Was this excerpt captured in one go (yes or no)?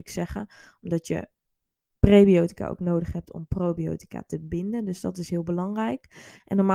yes